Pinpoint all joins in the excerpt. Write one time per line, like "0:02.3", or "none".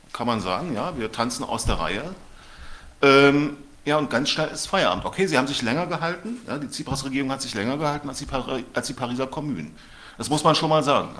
0:03.8